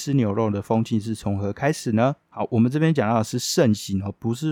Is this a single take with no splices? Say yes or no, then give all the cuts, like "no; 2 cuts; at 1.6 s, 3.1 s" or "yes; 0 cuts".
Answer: no; 1 cut; at 2.2 s